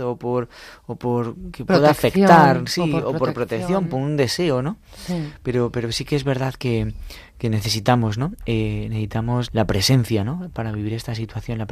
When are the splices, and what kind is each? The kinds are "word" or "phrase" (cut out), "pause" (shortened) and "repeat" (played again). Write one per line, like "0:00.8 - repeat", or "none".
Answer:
0:09.5 - word

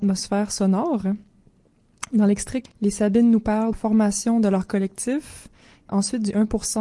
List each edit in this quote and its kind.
0:02.7 - word
0:03.7 - phrase
0:05.9 - word

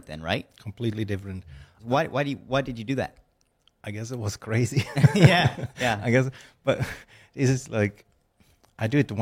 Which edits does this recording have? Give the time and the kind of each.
none

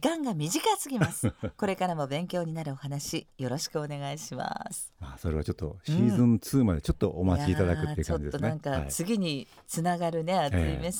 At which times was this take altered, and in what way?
none

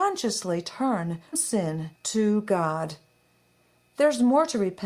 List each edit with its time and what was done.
0:01.3 - word
0:02.0 - pause

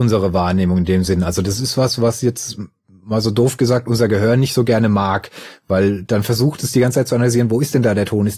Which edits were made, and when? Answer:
none

